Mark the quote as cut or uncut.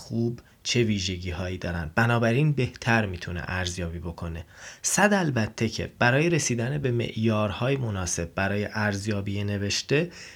uncut